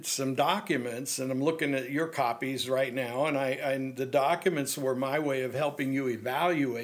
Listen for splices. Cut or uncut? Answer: uncut